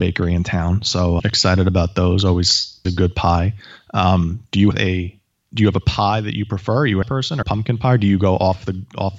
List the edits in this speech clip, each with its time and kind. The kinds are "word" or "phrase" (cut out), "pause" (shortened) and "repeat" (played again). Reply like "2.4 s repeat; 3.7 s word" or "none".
1.2 s word; 2.8 s word; 4.7 s word; 5.3 s pause; 7.0 s phrase; 7.4 s phrase